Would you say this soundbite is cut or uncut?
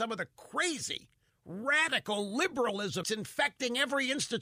cut